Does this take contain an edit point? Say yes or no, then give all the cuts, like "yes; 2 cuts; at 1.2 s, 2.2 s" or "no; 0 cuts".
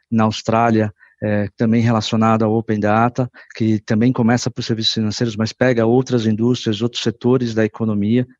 no; 0 cuts